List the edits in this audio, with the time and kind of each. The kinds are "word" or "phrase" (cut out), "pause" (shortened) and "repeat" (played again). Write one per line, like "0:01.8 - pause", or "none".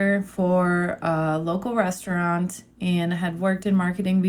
none